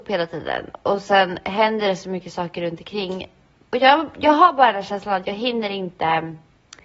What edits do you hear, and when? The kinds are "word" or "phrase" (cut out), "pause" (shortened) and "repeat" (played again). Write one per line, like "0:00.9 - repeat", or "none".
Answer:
none